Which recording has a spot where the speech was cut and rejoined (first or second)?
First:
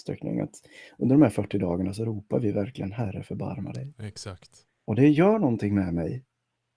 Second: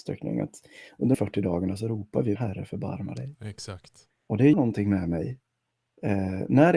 second